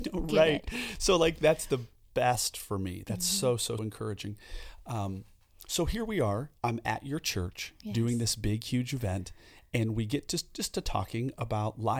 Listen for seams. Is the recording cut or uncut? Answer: cut